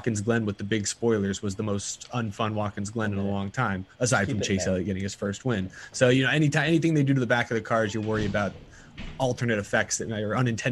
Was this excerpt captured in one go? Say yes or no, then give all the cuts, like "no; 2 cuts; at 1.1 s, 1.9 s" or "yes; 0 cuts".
yes; 0 cuts